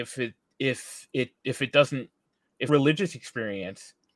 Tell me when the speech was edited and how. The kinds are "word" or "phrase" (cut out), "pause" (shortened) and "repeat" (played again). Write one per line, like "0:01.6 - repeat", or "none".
0:01.4 - word
0:02.7 - phrase